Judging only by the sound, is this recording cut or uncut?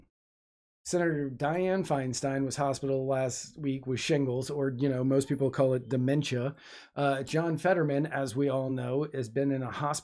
uncut